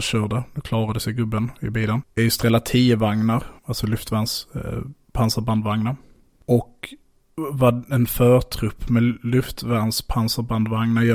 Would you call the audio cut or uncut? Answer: uncut